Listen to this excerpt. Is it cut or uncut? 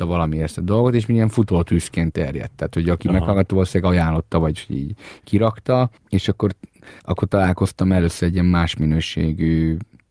cut